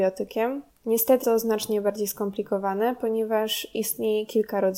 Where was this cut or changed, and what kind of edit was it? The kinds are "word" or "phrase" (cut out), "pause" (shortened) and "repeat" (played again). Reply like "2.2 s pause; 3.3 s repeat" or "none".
1.2 s word